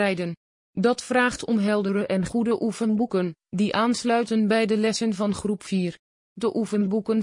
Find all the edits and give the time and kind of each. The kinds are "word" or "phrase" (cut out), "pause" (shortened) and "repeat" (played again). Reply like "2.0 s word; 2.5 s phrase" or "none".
none